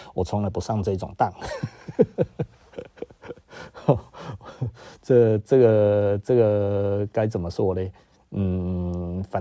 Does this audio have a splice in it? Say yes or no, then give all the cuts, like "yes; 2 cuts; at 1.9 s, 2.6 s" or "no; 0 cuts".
no; 0 cuts